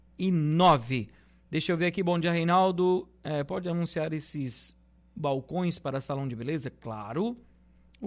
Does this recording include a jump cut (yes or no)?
no